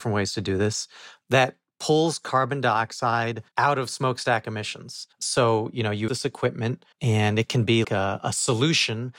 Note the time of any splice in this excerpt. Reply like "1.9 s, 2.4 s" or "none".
3.5 s, 5.1 s, 6.1 s, 6.9 s, 7.8 s